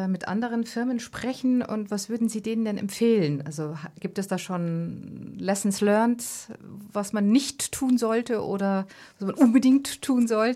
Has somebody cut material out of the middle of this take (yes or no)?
no